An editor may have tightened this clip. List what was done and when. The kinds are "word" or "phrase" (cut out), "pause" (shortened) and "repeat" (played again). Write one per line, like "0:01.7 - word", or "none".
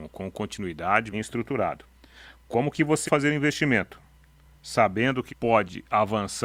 0:01.1 - word
0:03.0 - word
0:05.3 - word